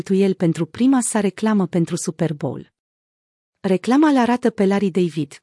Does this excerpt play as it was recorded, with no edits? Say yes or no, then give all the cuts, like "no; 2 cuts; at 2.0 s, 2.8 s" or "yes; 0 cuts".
yes; 0 cuts